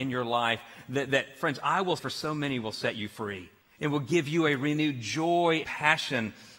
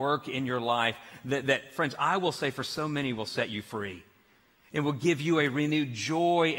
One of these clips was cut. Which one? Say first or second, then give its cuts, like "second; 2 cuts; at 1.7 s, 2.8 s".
first; 3 cuts; at 2.0 s, 3.6 s, 5.6 s